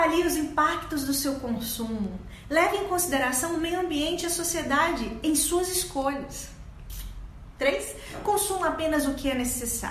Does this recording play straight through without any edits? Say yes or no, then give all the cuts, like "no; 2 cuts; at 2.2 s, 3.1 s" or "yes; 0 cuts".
yes; 0 cuts